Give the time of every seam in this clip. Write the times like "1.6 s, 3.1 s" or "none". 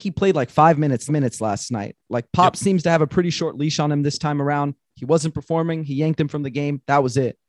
1.1 s